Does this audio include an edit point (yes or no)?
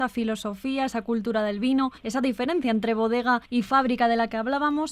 yes